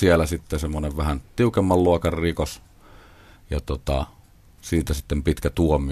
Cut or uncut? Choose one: uncut